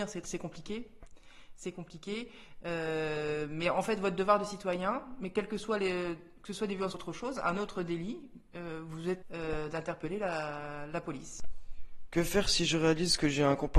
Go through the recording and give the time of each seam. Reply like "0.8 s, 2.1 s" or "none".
6.9 s, 9.2 s